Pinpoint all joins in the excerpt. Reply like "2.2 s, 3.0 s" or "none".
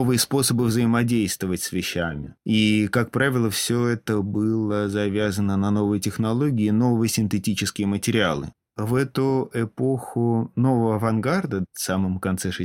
2.4 s